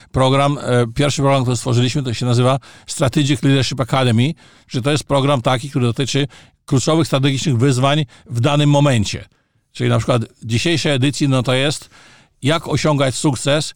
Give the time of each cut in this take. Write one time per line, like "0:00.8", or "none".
none